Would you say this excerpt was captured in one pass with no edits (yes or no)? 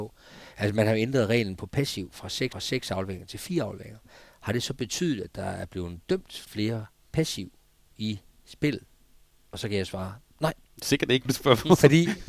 no